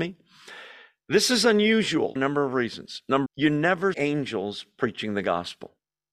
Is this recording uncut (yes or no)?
no